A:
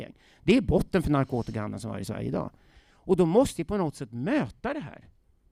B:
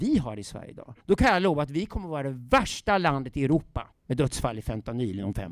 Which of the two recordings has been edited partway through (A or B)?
B